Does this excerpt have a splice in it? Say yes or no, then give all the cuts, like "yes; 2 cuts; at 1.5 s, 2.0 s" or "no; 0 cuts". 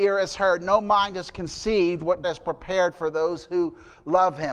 yes; 1 cut; at 2.2 s